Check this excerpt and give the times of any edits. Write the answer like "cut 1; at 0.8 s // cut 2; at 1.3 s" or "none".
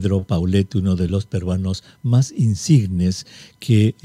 none